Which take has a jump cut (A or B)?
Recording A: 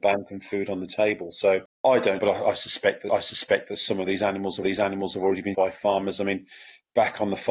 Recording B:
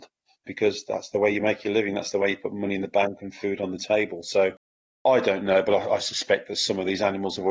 A